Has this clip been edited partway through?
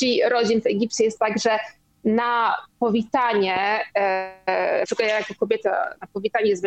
no; 0 cuts

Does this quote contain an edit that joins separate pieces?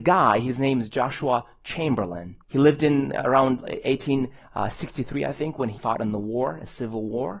yes; 2 cuts; at 2.4 s, 5.8 s

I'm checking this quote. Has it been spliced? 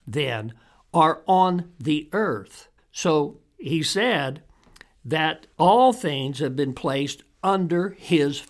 yes; 2 cuts; at 2.8 s, 5.5 s

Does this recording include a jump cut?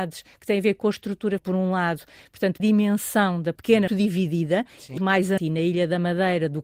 yes; 6 cuts; at 1.4 s, 2.6 s, 3.6 s, 3.9 s, 5.0 s, 5.4 s

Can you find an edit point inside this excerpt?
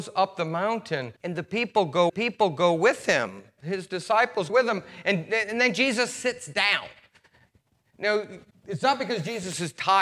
yes; 4 cuts; at 1.2 s, 2.1 s, 4.5 s, 8.5 s

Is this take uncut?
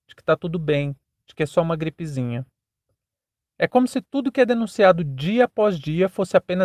yes; 0 cuts

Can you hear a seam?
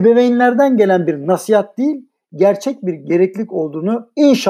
no; 0 cuts

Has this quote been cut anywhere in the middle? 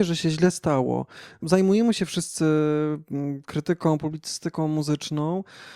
yes; 1 cut; at 1.4 s

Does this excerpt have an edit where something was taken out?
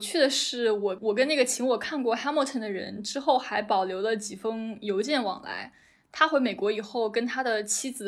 no; 0 cuts

